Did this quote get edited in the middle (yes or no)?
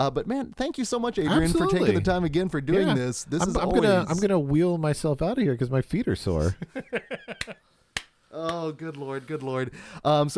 no